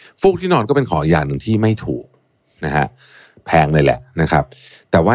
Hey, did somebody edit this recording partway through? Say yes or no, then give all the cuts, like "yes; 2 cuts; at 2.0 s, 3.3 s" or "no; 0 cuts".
no; 0 cuts